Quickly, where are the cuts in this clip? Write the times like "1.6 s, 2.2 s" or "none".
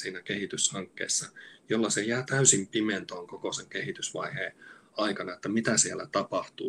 none

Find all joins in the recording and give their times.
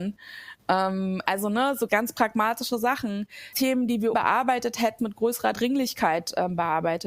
1.9 s, 3.5 s, 4.1 s, 5.0 s

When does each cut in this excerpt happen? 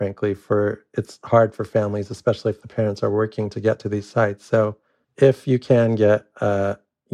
5.0 s

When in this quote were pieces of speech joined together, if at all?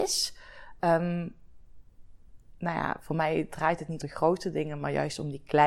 2.6 s, 4.0 s

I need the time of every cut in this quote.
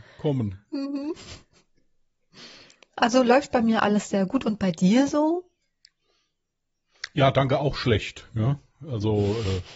none

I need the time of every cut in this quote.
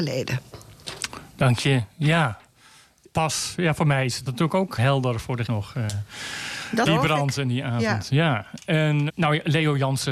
3.1 s, 4.3 s, 4.8 s, 5.5 s, 6.8 s, 9.1 s

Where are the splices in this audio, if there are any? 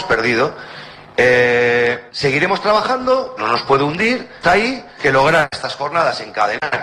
2.1 s, 3.4 s, 4.4 s, 5.0 s

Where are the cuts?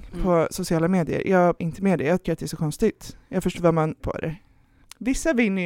1.6 s, 2.2 s, 3.6 s, 4.0 s

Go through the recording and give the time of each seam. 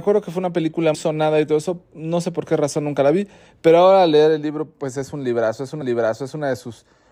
0.9 s, 5.8 s

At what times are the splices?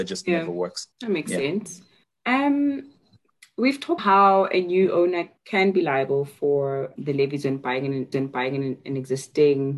0.9 s, 2.0 s, 4.0 s, 5.4 s, 7.0 s, 8.1 s

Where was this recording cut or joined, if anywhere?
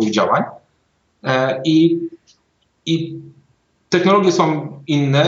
none

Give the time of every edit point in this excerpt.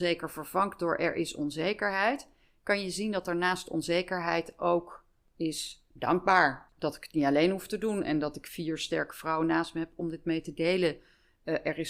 none

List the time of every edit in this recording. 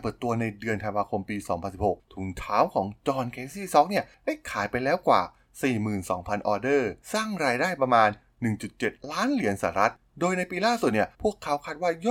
7.0 s, 11.1 s

